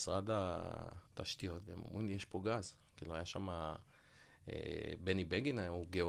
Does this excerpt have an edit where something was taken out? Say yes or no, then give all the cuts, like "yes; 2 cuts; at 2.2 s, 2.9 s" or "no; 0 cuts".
yes; 1 cut; at 1.1 s